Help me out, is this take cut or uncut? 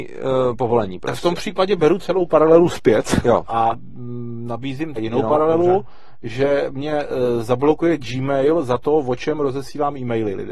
cut